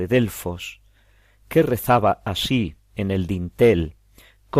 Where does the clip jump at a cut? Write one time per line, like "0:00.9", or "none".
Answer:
none